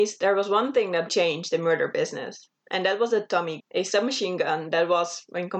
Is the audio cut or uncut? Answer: cut